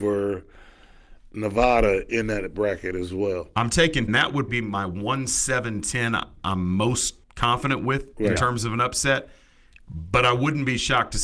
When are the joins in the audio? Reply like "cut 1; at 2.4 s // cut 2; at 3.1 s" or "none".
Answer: cut 1; at 4.1 s // cut 2; at 4.5 s // cut 3; at 7.2 s